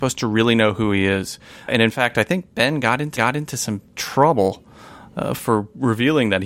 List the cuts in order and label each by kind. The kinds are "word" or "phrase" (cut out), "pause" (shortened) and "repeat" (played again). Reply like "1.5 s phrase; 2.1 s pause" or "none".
1.7 s word; 3.2 s repeat